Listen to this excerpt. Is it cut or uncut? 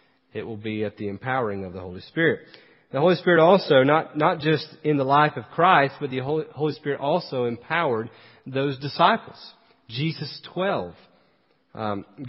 uncut